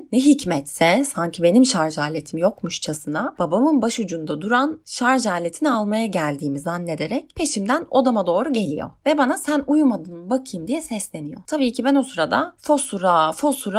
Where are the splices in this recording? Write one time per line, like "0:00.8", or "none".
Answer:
none